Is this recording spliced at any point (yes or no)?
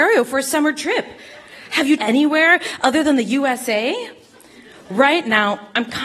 yes